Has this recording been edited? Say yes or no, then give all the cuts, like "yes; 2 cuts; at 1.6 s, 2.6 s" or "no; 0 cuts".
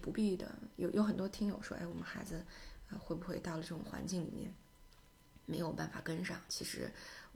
no; 0 cuts